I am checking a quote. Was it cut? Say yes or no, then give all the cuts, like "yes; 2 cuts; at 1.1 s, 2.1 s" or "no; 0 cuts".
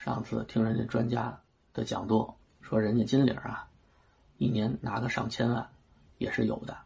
yes; 1 cut; at 2.6 s